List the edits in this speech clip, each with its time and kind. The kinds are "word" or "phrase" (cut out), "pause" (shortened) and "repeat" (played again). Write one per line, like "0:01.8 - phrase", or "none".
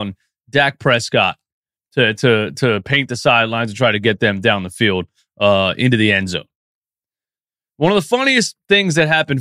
none